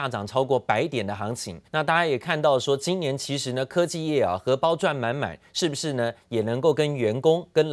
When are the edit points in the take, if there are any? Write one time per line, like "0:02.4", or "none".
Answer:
0:01.7